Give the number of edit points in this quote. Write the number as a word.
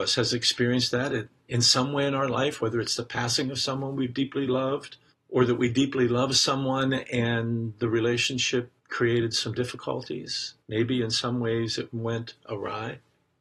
three